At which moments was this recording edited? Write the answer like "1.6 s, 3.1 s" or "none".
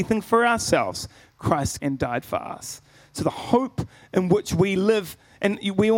1.8 s